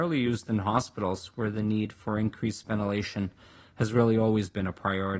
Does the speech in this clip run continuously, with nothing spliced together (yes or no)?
yes